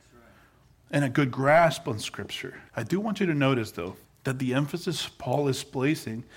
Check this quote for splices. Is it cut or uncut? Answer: cut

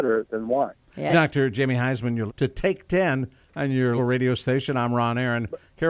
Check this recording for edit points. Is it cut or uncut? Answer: cut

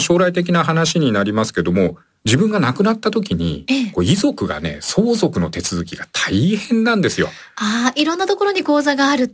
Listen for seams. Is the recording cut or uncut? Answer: uncut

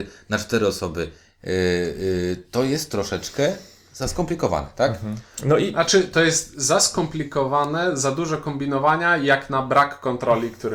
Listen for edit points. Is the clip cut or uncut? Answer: uncut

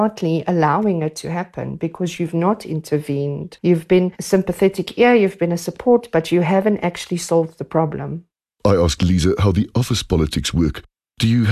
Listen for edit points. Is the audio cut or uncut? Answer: uncut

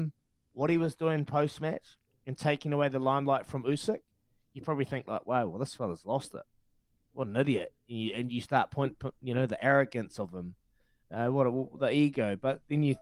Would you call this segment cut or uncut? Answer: uncut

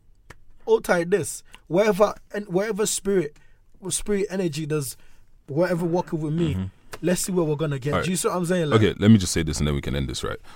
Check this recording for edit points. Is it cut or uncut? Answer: uncut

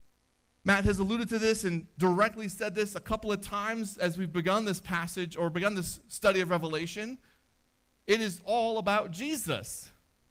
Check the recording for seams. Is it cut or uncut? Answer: uncut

